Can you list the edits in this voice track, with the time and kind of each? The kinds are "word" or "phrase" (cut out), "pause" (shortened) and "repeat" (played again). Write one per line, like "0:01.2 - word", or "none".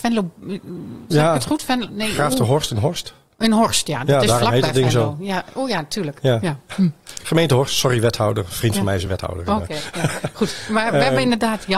none

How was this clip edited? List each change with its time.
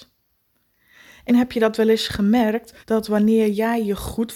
0:01.3 - word
0:02.8 - pause

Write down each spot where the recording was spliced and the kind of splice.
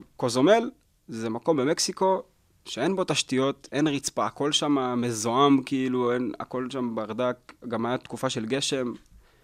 none

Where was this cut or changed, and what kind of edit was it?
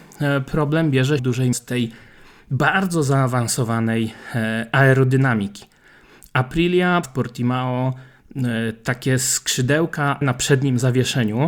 0:01.2 - word
0:01.5 - word
0:07.0 - word
0:10.2 - phrase

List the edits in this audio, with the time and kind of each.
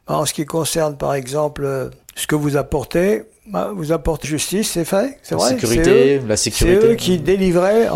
0:02.0 - pause
0:04.2 - word

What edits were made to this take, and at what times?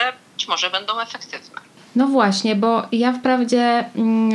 none

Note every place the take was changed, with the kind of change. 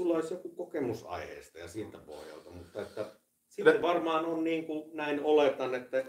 none

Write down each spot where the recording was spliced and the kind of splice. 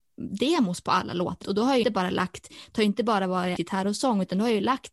0:01.4 - word
0:01.8 - word
0:03.6 - word

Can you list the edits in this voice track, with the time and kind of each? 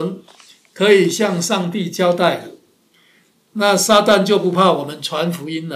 none

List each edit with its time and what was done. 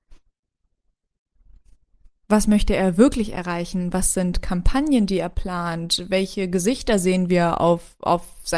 none

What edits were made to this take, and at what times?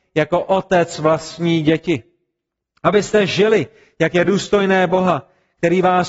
none

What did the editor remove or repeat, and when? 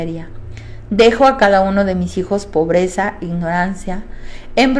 none

